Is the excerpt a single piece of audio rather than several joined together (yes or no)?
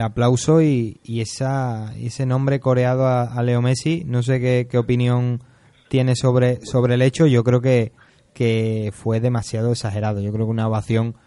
yes